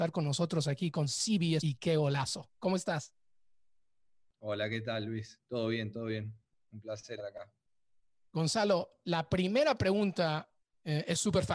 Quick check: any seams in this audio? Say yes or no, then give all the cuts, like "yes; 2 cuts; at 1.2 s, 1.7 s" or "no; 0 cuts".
yes; 2 cuts; at 1.6 s, 7.2 s